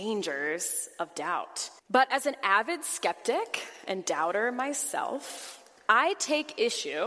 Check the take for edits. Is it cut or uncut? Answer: cut